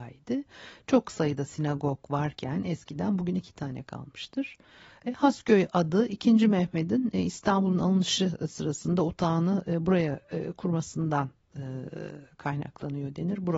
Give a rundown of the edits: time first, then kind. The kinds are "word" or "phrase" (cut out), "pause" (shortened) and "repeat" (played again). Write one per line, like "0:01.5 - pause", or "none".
none